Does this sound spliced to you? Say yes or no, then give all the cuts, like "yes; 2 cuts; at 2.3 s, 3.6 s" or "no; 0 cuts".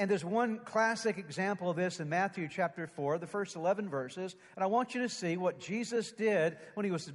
no; 0 cuts